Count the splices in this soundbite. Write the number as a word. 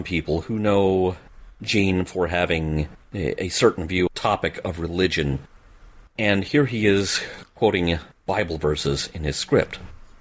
three